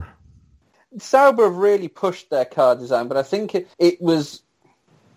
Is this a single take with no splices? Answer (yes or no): no